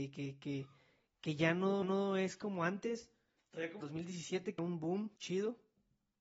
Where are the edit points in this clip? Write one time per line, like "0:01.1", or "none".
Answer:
0:01.8
0:03.4
0:03.8
0:04.6
0:05.2